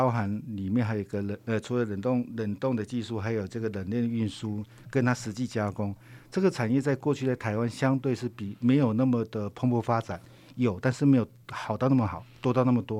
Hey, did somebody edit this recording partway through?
no; 0 cuts

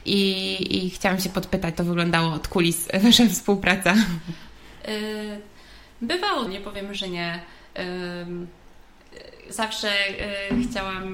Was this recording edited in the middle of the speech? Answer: yes; 2 cuts; at 1.7 s, 6.5 s

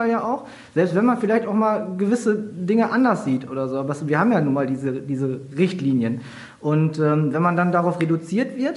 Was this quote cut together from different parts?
no; 0 cuts

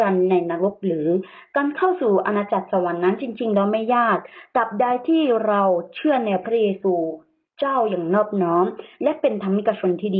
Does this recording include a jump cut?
no; 0 cuts

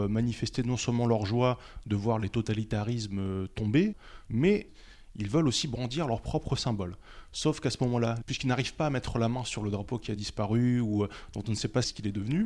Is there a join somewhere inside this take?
no; 0 cuts

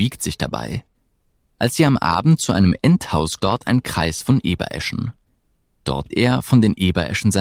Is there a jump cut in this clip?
yes; 2 cuts; at 3.4 s, 6.1 s

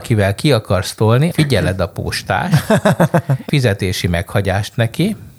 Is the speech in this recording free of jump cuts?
no; 2 cuts; at 1.3 s, 3.5 s

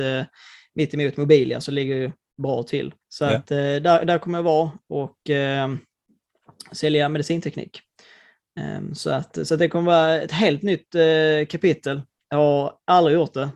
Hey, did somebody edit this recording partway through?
yes; 1 cut; at 3.0 s

